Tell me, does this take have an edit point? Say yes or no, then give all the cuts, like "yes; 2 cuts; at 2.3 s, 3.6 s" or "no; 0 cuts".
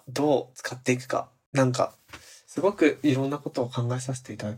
no; 0 cuts